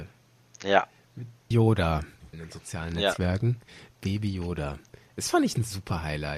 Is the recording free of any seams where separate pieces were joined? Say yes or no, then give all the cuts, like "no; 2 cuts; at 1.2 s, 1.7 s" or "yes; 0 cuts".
no; 2 cuts; at 1.5 s, 2.3 s